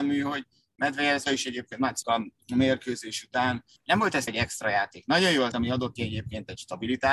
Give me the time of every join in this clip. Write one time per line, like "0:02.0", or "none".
0:01.2
0:02.0
0:03.8
0:04.3
0:05.5
0:06.0